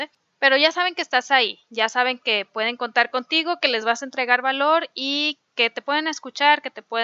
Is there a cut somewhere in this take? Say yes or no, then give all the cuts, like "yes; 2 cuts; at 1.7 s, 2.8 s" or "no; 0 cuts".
no; 0 cuts